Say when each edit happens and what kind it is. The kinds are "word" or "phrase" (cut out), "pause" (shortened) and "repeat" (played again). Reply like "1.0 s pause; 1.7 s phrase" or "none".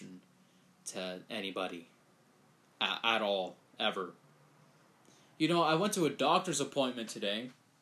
none